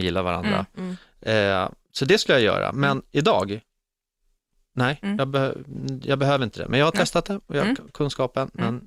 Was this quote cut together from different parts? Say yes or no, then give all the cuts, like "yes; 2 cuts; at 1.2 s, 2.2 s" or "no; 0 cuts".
no; 0 cuts